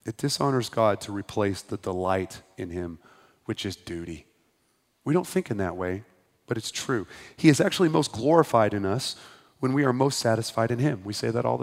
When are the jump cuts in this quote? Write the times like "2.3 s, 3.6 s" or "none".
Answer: none